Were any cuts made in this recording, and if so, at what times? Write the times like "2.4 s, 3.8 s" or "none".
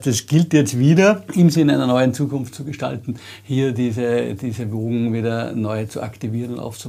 1.3 s